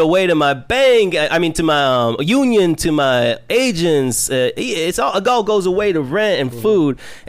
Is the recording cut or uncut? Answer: uncut